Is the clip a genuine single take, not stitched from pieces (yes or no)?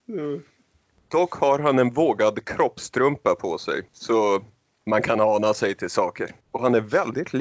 no